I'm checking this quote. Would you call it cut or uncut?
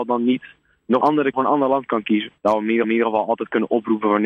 cut